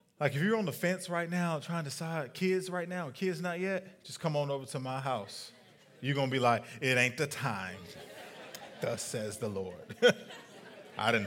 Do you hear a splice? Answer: no; 0 cuts

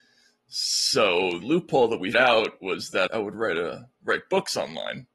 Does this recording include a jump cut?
yes; 4 cuts; at 1.4 s, 2.1 s, 3.1 s, 3.9 s

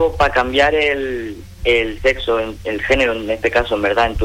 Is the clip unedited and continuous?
yes; 0 cuts

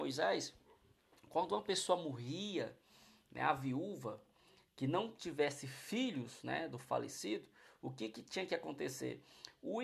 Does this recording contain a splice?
no; 0 cuts

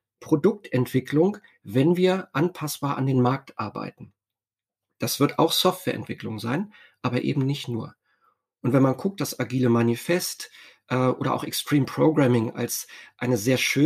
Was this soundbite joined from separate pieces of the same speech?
no; 0 cuts

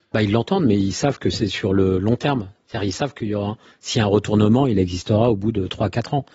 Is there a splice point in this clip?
no; 0 cuts

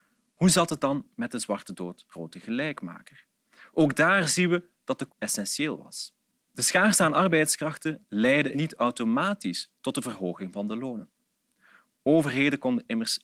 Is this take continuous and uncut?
no; 3 cuts; at 2.1 s, 5.1 s, 8.5 s

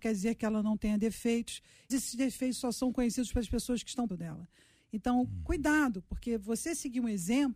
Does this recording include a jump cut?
yes; 2 cuts; at 1.9 s, 4.1 s

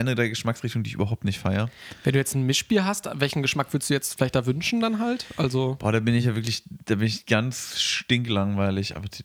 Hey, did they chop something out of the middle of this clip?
no; 0 cuts

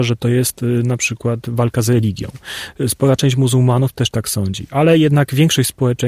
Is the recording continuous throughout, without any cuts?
yes; 0 cuts

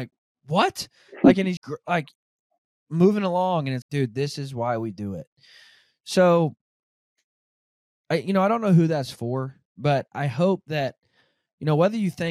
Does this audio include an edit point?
yes; 3 cuts; at 1.6 s, 3.8 s, 10.1 s

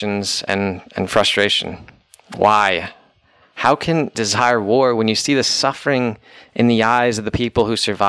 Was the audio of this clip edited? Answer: yes; 1 cut; at 4.1 s

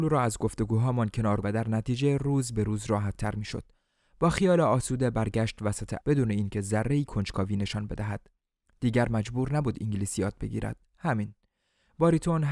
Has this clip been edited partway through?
yes; 2 cuts; at 1.4 s, 6.0 s

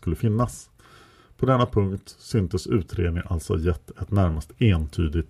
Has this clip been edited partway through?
no; 0 cuts

